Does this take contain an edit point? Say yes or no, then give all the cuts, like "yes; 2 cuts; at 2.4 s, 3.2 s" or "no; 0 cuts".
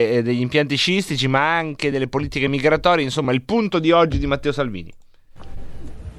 no; 0 cuts